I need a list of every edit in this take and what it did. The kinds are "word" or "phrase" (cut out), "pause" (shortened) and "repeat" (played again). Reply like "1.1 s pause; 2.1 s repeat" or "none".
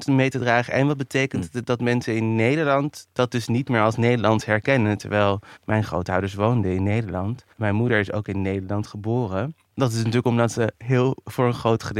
5.6 s pause; 7.5 s pause; 9.6 s pause